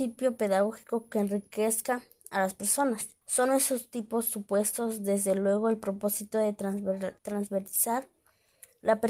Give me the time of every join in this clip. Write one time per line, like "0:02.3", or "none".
0:03.2
0:07.2

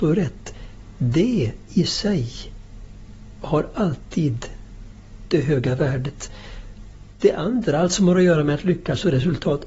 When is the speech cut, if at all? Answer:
none

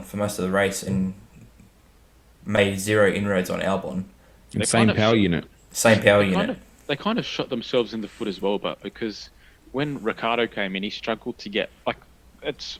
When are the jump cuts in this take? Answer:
none

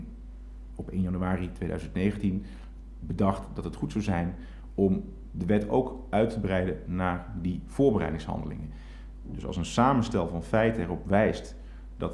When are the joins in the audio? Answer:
none

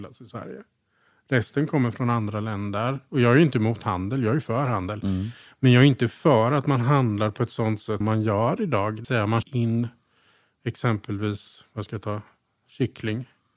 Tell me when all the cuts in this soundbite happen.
0:08.0
0:09.0
0:09.4

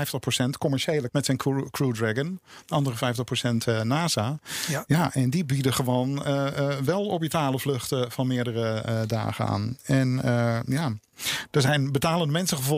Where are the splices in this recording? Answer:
0:01.1

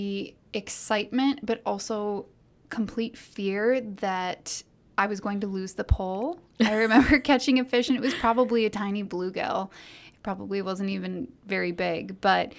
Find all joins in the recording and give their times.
none

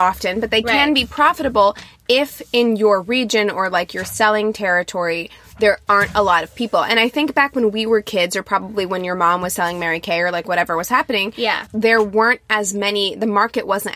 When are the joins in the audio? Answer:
0:11.7

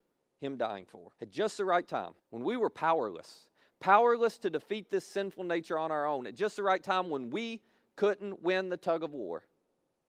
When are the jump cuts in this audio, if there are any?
0:01.1
0:02.2

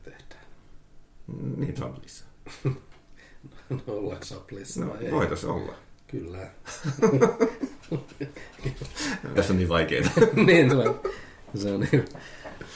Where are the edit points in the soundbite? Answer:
0:01.8
0:04.2
0:09.4
0:10.7

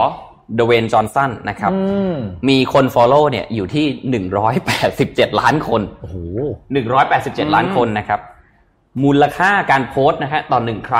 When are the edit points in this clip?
none

